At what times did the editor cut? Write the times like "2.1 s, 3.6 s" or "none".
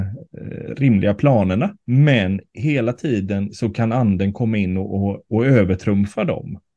1.8 s